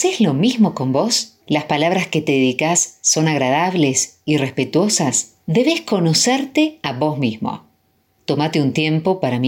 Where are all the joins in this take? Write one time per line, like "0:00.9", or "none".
0:01.4
0:05.4